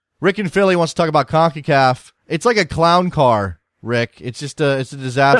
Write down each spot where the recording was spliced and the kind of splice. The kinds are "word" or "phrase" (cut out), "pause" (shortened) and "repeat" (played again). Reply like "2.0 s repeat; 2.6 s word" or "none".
2.2 s pause